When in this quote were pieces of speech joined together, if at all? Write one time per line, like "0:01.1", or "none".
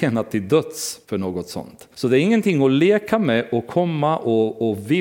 0:01.0
0:01.9